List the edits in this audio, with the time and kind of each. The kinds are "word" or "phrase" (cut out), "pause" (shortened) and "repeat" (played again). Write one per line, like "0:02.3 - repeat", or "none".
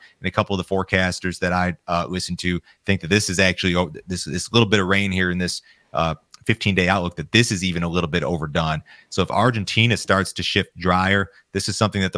none

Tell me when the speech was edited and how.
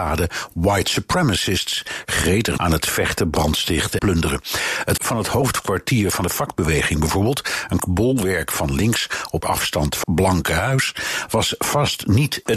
0:02.6 - word
0:04.0 - word
0:05.0 - word
0:07.8 - word
0:09.4 - word
0:10.0 - word

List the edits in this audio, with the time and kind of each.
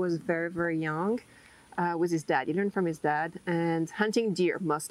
none

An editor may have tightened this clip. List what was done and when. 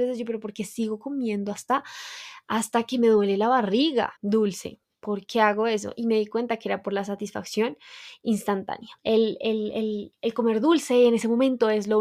0:04.2 - pause
0:09.0 - pause

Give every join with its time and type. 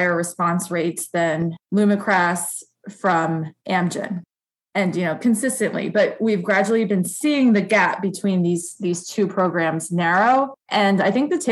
0:01.6 - pause
0:03.6 - pause
0:10.6 - pause

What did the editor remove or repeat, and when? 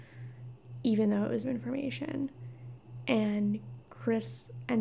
0:01.4 - word

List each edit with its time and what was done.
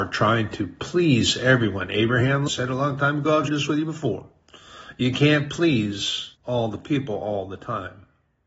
0:02.5 - word
0:03.5 - word
0:06.4 - pause

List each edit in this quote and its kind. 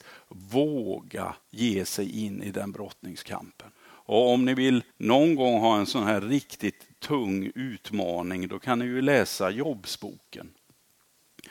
0:01.4 - pause
0:03.7 - pause
0:04.9 - pause

